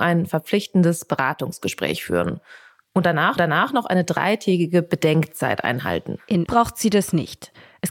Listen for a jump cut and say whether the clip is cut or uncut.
cut